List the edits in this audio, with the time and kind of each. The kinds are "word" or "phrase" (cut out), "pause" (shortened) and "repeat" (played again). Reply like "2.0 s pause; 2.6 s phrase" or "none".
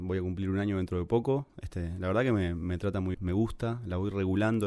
3.1 s word

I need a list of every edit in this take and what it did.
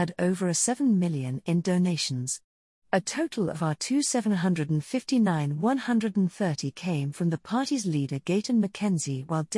none

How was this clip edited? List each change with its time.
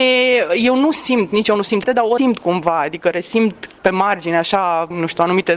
1.9 s word; 2.2 s word

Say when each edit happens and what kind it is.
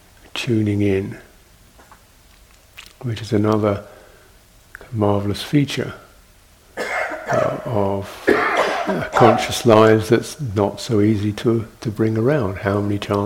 none

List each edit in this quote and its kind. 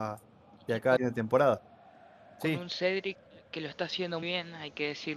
1.0 s word; 4.2 s word

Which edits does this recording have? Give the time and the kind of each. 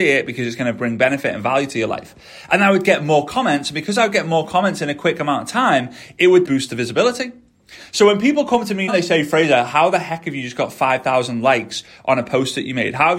6.4 s word; 8.9 s word

